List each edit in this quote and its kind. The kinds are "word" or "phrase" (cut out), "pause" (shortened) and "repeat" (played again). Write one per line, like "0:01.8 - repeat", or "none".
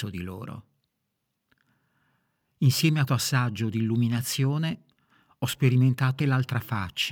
0:03.1 - word
0:06.2 - word